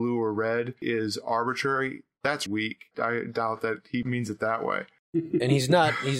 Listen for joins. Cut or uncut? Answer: cut